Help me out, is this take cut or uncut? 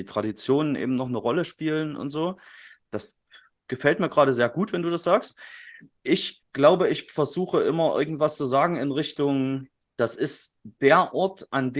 uncut